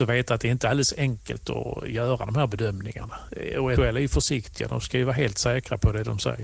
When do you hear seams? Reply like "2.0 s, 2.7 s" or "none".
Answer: 3.8 s

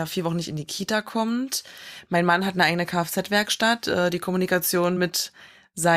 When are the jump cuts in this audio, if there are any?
none

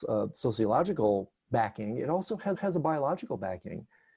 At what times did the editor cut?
1.4 s, 2.6 s

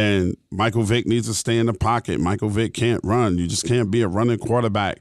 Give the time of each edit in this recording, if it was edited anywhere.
none

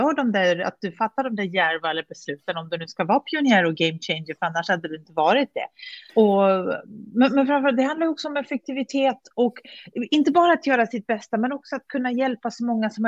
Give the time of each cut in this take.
6.1 s

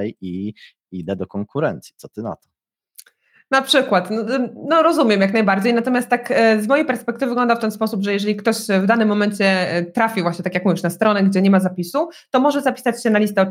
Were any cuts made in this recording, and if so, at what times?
none

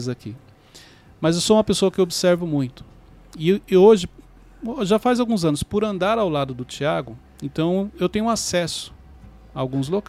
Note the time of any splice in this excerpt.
none

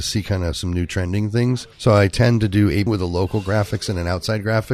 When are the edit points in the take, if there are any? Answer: 1.7 s, 2.9 s

